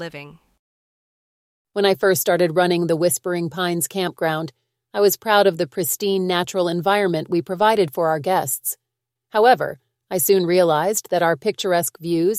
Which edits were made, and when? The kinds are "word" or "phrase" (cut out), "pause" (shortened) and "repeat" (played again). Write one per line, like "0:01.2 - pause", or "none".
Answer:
none